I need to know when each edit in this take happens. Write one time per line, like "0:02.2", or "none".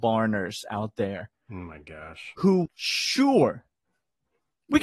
0:02.7